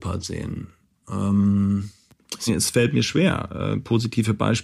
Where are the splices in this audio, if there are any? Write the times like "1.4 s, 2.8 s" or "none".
2.5 s